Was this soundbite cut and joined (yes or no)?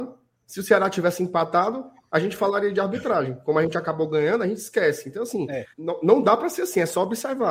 yes